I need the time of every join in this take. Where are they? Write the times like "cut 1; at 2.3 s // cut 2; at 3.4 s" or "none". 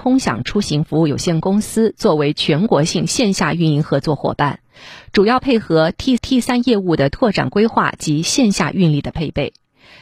cut 1; at 6.2 s